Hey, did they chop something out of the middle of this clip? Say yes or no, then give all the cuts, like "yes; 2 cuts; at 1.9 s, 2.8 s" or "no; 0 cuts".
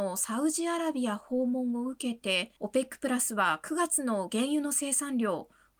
yes; 1 cut; at 2.6 s